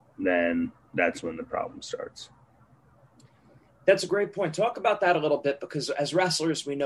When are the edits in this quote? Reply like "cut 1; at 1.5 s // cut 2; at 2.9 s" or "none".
none